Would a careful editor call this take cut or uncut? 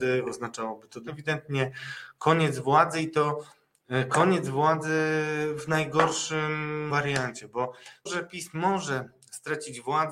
cut